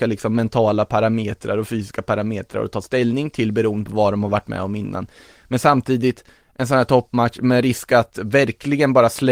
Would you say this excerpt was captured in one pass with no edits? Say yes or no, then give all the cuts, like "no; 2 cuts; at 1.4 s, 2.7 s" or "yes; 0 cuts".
yes; 0 cuts